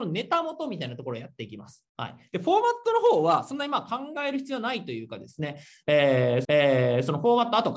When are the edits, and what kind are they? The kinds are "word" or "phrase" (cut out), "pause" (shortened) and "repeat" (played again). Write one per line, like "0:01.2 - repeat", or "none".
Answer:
0:01.9 - pause
0:06.4 - repeat